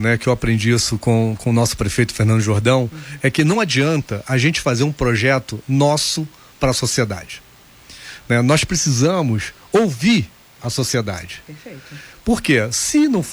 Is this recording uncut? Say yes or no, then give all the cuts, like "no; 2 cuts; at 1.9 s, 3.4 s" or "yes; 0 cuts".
yes; 0 cuts